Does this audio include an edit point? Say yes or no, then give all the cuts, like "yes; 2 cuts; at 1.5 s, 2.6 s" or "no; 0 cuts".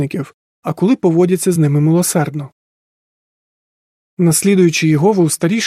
no; 0 cuts